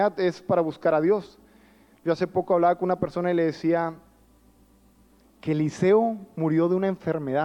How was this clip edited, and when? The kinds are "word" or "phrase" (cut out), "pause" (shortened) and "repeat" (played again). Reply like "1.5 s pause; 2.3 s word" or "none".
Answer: none

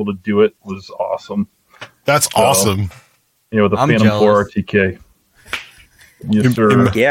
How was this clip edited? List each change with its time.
none

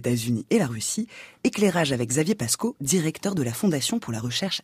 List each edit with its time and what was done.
none

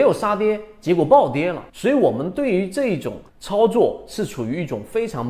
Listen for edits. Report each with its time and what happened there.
1.7 s pause; 3.3 s pause

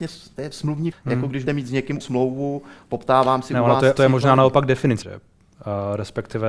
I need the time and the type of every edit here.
0.9 s word; 1.5 s word; 2.0 s word; 4.0 s word; 5.0 s word

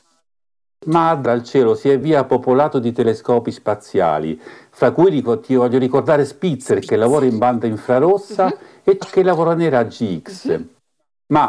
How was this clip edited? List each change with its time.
1.3 s word; 2.0 s word; 9.0 s word

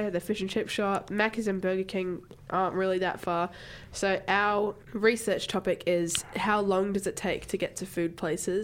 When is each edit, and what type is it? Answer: 4.8 s pause

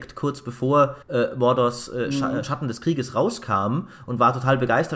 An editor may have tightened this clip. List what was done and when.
1.0 s pause

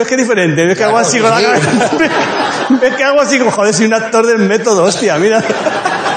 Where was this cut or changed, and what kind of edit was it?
none

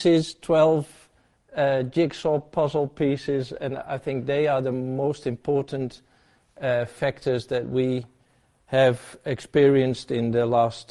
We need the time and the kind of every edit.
none

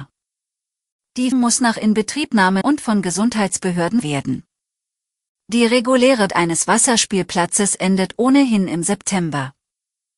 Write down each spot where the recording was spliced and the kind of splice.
1.3 s word; 2.6 s phrase; 4.0 s word; 6.3 s word

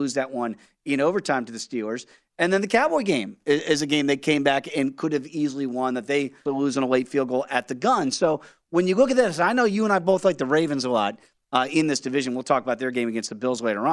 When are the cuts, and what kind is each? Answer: 6.5 s word

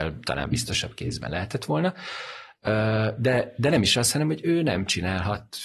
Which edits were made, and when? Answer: none

